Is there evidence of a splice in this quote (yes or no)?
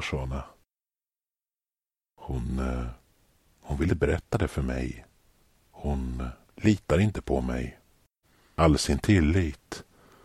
yes